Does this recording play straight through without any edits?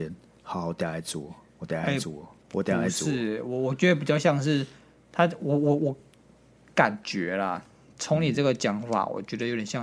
yes; 0 cuts

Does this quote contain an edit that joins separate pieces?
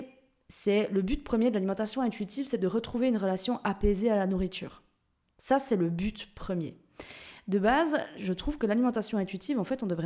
no; 0 cuts

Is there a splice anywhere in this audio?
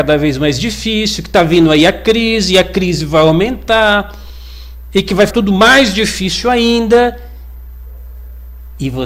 yes; 1 cut; at 5.3 s

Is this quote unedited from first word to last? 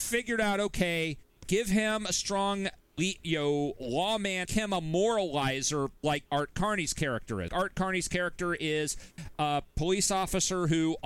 no; 3 cuts; at 4.4 s, 6.3 s, 7.5 s

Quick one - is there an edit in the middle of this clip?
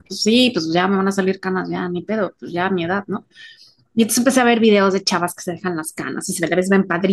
no; 0 cuts

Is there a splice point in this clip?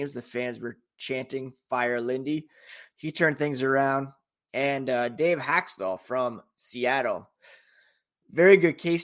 no; 0 cuts

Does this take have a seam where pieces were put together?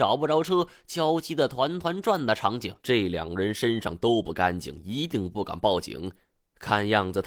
yes; 1 cut; at 2.8 s

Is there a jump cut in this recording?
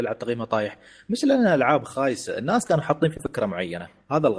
yes; 1 cut; at 3.2 s

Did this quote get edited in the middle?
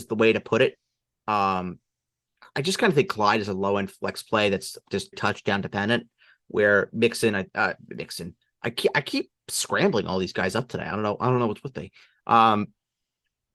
yes; 1 cut; at 5.1 s

